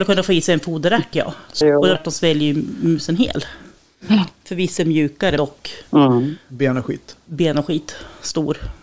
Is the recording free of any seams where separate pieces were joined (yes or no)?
no